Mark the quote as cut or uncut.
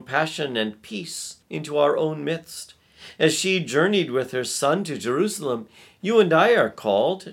cut